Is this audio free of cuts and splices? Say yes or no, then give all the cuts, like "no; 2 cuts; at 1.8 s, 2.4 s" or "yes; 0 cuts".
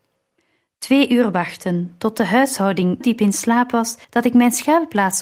no; 2 cuts; at 3.0 s, 4.0 s